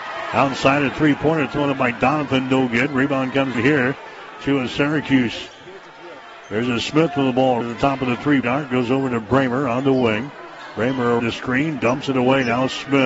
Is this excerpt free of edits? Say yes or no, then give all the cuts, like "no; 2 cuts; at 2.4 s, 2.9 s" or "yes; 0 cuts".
no; 4 cuts; at 3.5 s, 7.6 s, 8.4 s, 11.2 s